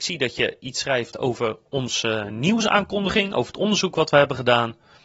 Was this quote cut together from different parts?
no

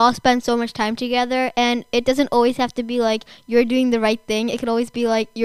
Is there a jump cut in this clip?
no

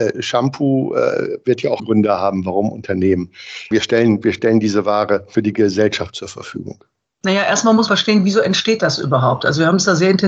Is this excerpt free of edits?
no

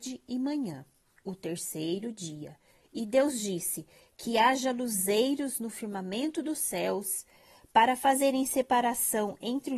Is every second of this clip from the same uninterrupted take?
yes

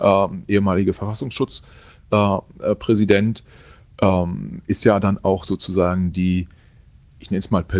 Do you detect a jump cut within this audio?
no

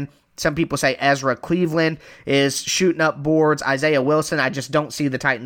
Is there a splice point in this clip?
no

